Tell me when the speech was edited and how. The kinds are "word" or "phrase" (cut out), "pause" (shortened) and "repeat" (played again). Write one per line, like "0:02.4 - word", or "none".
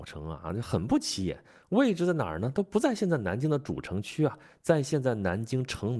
none